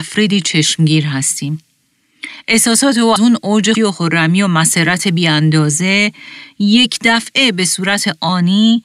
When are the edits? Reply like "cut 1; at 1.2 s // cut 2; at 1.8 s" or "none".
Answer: cut 1; at 3.2 s // cut 2; at 3.7 s